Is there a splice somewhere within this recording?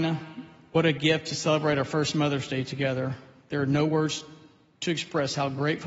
no; 0 cuts

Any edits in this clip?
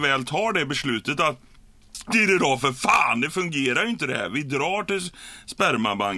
yes; 1 cut; at 2.1 s

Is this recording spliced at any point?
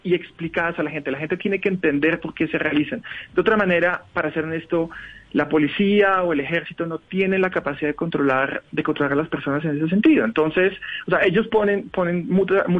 no; 0 cuts

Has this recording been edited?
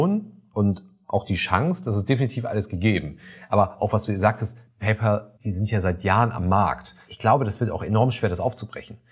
yes; 1 cut; at 5.4 s

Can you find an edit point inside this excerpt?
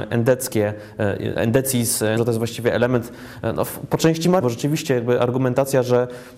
yes; 2 cuts; at 2.2 s, 4.4 s

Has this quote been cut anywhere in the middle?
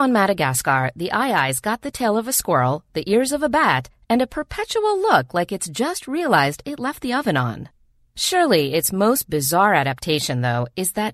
no; 0 cuts

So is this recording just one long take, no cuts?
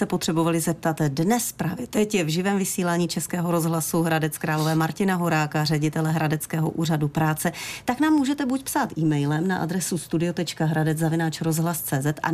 yes; 0 cuts

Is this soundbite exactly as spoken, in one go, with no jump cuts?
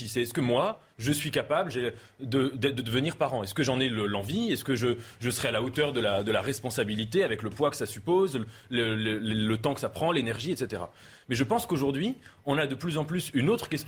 yes; 0 cuts

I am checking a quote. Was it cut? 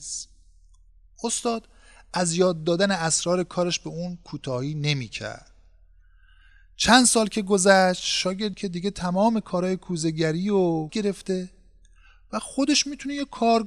yes; 2 cuts; at 8.5 s, 10.9 s

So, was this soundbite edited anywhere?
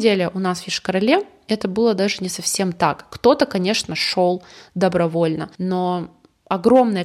no; 0 cuts

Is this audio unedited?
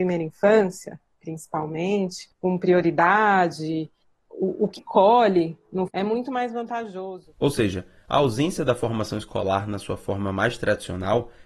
no; 3 cuts; at 2.3 s, 4.8 s, 5.9 s

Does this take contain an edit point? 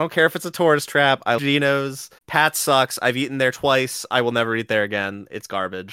yes; 2 cuts; at 1.4 s, 2.2 s

